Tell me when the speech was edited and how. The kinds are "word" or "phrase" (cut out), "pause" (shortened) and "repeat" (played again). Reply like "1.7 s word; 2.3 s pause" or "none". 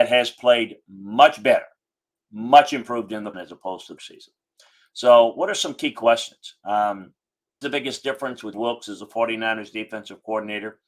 3.3 s word; 4.0 s word; 7.6 s word; 8.5 s word